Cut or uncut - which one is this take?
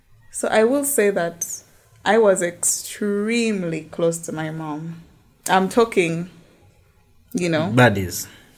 uncut